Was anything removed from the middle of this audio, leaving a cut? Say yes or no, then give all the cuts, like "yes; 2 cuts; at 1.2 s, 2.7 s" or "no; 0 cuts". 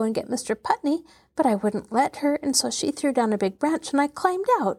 no; 0 cuts